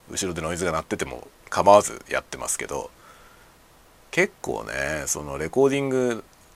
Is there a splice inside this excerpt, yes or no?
no